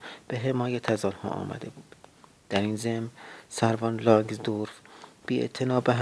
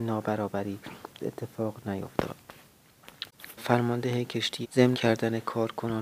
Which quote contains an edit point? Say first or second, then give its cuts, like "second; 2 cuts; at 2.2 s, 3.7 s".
second; 4 cuts; at 1.2 s, 3.6 s, 4.6 s, 4.9 s